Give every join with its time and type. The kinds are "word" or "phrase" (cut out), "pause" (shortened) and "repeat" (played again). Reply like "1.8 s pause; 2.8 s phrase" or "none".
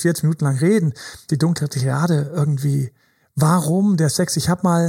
1.3 s word